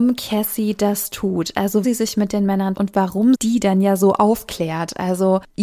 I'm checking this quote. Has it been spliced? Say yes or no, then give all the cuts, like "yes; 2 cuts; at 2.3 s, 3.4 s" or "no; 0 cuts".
yes; 3 cuts; at 1.8 s, 2.7 s, 3.3 s